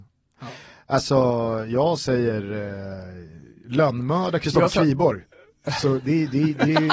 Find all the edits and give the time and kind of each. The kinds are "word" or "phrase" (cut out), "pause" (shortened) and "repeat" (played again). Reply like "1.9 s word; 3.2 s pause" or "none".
none